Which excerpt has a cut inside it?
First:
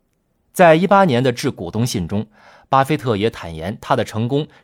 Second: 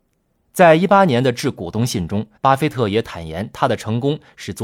second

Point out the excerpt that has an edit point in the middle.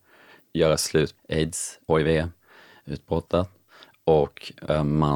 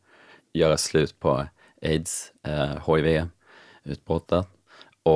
first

